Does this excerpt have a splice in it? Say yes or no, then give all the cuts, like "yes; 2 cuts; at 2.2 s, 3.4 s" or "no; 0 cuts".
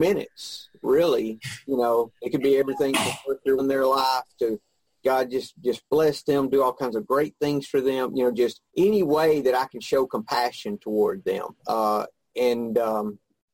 yes; 4 cuts; at 2.2 s, 3.6 s, 8.7 s, 11.6 s